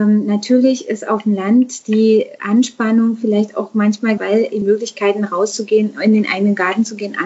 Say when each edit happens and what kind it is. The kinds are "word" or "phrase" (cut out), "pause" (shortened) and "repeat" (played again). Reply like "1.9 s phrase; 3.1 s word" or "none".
4.2 s word; 4.6 s word